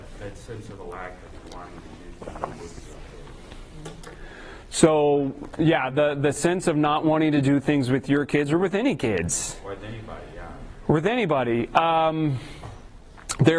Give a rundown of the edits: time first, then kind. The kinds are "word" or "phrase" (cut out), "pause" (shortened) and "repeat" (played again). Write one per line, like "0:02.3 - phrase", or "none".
none